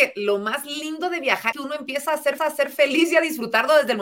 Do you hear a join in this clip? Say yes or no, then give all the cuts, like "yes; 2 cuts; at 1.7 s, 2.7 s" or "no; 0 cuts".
yes; 2 cuts; at 1.5 s, 2.4 s